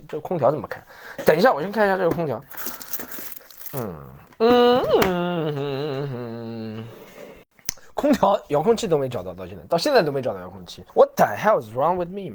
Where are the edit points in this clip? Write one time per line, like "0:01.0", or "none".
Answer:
0:10.9